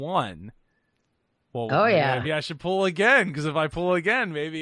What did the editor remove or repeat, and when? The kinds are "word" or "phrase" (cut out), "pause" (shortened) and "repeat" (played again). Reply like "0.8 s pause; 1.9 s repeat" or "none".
2.2 s word